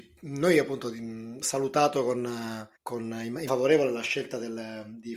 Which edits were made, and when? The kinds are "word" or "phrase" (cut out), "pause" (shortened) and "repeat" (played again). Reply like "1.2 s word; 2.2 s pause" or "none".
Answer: 1.4 s word; 2.8 s pause; 3.5 s word